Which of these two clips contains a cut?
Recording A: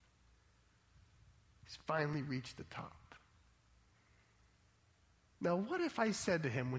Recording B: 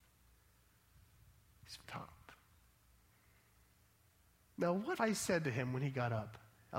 B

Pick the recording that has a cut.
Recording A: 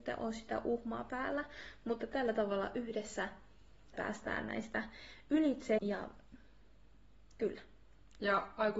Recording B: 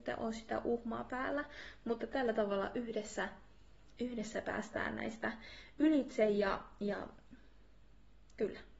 A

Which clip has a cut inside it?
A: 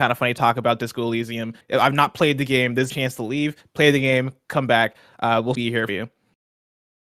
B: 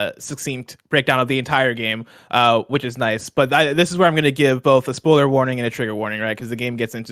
A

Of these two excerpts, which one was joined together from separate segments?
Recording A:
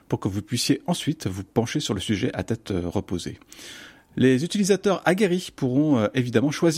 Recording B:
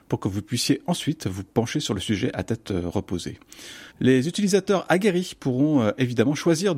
B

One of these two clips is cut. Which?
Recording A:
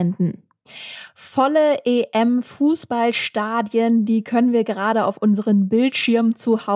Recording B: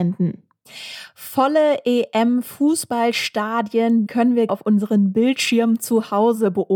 B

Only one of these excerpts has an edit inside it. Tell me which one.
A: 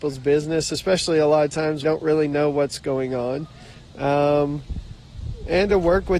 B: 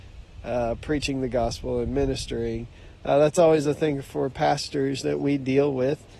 A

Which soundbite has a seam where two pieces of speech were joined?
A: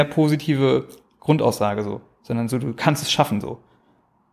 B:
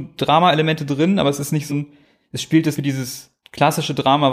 B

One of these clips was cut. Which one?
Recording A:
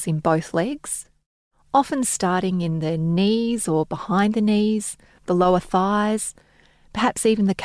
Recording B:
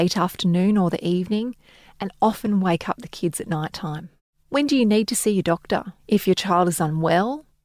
B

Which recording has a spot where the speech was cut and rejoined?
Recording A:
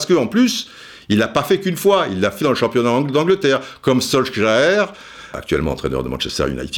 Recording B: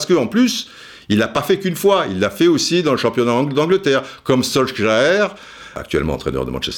A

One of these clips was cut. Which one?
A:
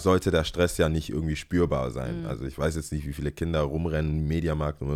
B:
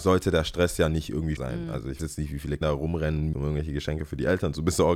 B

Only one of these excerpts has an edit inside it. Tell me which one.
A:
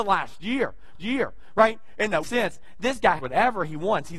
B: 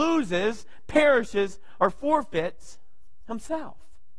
A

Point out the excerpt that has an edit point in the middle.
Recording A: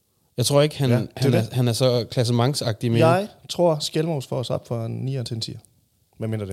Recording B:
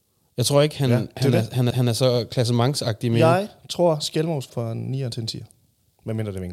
B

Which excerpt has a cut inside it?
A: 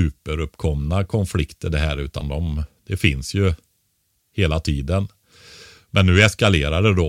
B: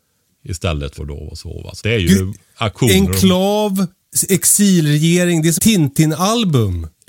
B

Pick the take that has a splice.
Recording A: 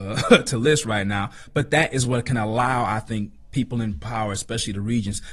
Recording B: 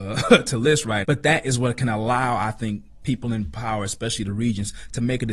B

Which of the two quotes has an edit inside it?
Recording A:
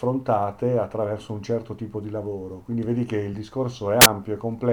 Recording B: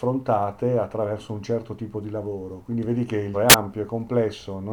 B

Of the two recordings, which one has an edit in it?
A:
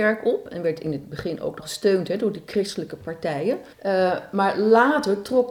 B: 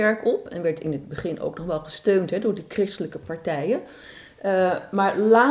A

